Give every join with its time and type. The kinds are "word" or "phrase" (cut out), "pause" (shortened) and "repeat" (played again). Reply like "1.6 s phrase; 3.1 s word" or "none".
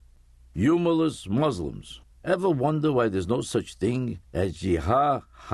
2.1 s pause; 4.2 s pause

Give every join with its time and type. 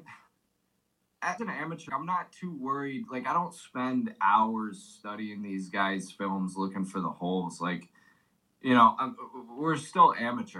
1.4 s word; 1.9 s word

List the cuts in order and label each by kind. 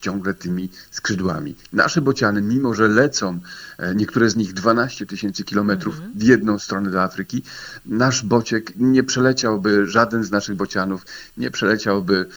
8.7 s word

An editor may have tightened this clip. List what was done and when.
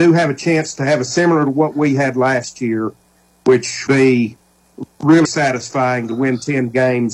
1.1 s word; 3.9 s word; 5.2 s word

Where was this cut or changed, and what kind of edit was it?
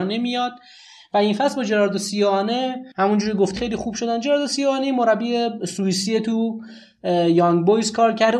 2.9 s pause; 3.6 s word

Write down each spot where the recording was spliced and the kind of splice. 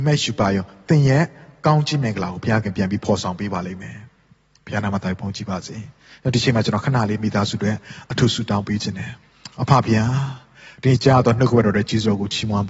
none

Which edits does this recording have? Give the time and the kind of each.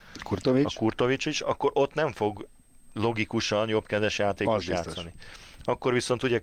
none

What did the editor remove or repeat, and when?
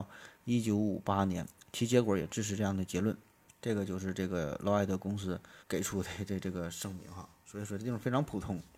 3.5 s pause; 5.6 s word

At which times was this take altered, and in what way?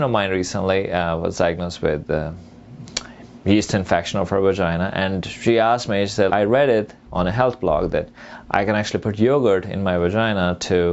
6.3 s word

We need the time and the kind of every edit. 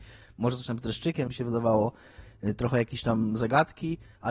1.3 s phrase

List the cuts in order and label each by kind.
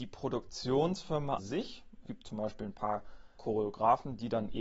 1.4 s word; 2.1 s word; 3.4 s word

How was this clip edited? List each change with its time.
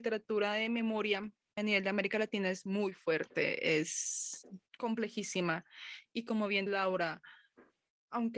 1.6 s word; 4.7 s pause; 6.7 s word

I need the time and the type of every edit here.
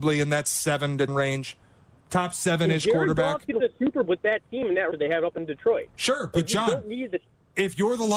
1.1 s word; 3.6 s word; 4.0 s word; 4.9 s word

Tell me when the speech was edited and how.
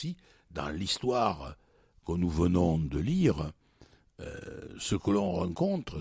none

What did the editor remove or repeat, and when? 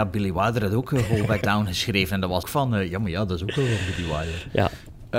1.4 s word; 2.4 s word

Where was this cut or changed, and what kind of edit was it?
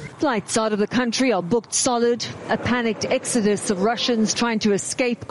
none

